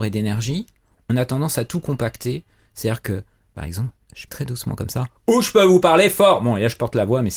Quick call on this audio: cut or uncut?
cut